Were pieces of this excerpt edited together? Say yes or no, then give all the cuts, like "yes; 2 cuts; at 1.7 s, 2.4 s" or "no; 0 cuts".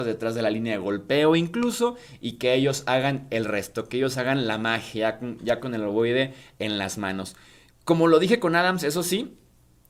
no; 0 cuts